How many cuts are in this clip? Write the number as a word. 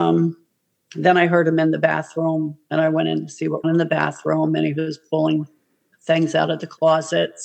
one